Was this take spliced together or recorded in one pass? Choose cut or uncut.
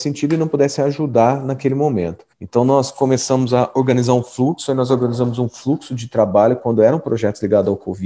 uncut